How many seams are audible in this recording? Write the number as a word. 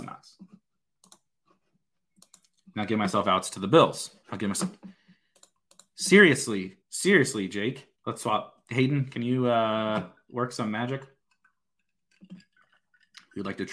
three